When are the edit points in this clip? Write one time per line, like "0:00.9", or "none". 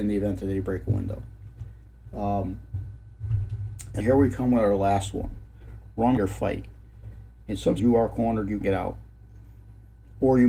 0:04.0
0:06.2
0:07.8
0:08.6